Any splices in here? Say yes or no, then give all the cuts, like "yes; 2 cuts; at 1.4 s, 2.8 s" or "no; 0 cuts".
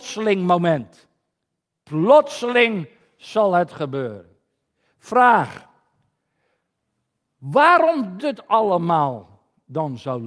yes; 1 cut; at 8.2 s